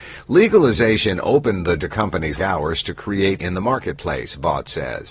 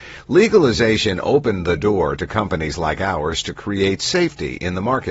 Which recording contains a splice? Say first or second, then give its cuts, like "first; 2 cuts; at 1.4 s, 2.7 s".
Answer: first; 3 cuts; at 1.8 s, 2.4 s, 3.4 s